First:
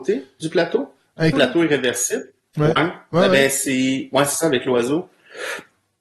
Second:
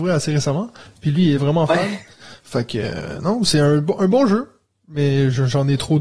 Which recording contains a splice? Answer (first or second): first